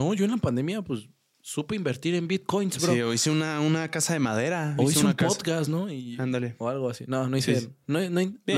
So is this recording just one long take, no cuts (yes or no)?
yes